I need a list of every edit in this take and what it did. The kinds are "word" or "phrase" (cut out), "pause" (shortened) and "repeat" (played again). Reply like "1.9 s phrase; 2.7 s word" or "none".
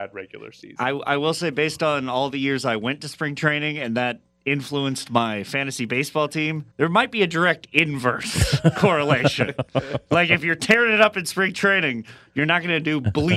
6.7 s pause